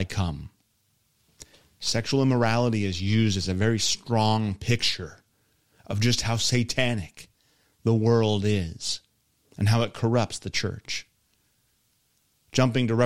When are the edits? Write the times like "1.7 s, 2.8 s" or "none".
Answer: none